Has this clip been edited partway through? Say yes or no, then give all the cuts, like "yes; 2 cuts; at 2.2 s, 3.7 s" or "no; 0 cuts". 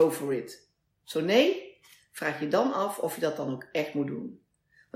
no; 0 cuts